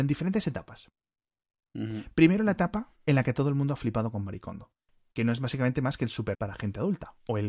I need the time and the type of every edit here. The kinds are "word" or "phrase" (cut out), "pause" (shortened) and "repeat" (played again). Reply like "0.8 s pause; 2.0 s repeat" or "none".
3.0 s pause; 6.3 s word